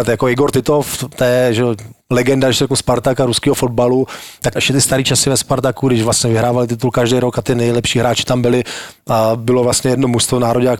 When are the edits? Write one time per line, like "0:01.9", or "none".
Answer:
0:02.0
0:04.6